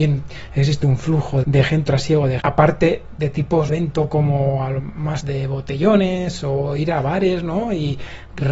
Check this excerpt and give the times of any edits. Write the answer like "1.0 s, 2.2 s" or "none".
1.4 s, 1.9 s, 2.4 s, 3.7 s, 4.8 s, 5.2 s